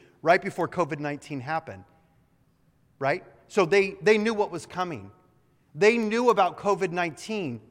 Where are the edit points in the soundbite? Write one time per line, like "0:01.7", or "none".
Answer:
none